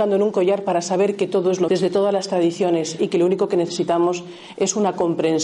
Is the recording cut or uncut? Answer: cut